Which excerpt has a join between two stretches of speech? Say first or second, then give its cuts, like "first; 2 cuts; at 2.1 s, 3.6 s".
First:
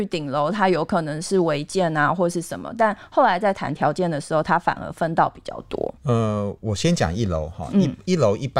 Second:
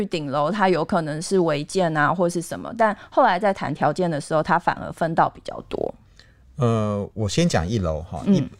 first; 1 cut; at 6.0 s